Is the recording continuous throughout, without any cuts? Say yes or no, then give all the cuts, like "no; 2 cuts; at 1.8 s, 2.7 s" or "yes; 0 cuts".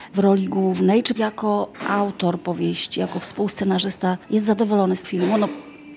no; 3 cuts; at 1.2 s, 4.2 s, 5.0 s